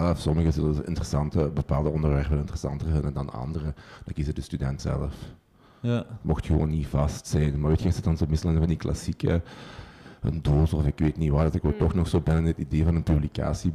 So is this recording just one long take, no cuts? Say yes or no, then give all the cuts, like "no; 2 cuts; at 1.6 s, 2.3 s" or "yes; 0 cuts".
no; 1 cut; at 4.8 s